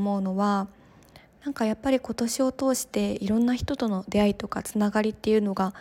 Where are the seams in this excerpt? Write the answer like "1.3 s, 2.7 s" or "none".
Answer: none